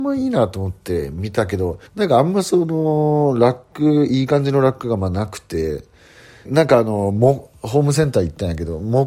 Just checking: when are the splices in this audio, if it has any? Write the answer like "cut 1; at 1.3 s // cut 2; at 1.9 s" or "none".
cut 1; at 1.9 s // cut 2; at 6.5 s